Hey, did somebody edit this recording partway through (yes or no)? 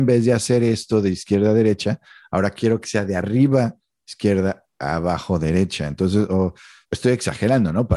no